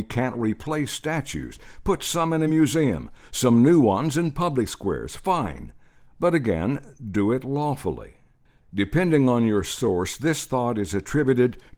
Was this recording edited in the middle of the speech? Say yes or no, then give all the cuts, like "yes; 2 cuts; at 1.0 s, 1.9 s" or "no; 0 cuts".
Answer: no; 0 cuts